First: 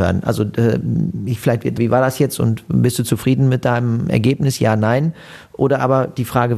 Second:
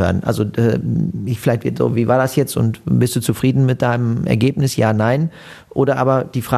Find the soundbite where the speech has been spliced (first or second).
first